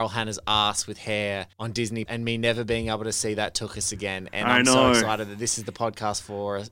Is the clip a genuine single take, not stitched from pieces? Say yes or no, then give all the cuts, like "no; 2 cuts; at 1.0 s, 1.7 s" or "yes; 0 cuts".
no; 2 cuts; at 1.5 s, 2.1 s